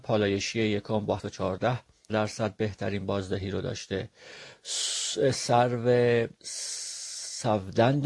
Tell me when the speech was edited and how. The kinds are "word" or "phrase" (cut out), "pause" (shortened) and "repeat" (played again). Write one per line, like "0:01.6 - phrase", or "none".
0:01.2 - word
0:02.1 - word
0:06.4 - pause